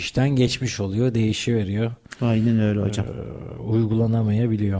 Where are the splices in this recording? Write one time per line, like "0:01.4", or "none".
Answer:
none